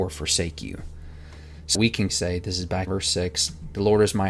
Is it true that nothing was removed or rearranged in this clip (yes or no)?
no